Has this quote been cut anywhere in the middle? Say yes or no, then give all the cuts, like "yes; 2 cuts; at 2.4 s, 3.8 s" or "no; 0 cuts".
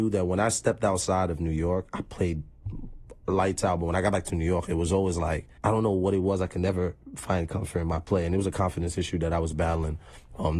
yes; 1 cut; at 5.6 s